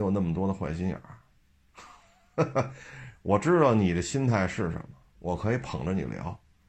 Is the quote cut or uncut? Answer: uncut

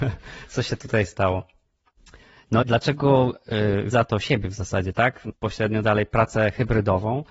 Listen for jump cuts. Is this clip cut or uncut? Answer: cut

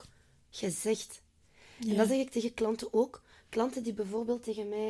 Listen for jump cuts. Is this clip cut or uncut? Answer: uncut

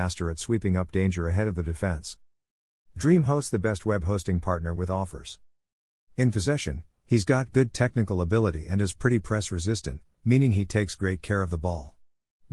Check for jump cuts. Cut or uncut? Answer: uncut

